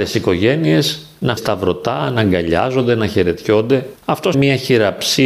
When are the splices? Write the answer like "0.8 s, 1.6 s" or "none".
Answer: 1.4 s, 4.3 s